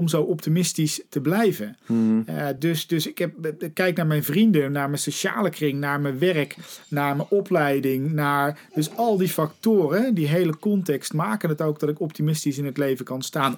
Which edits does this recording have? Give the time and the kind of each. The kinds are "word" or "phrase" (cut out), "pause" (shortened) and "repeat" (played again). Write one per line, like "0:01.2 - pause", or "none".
none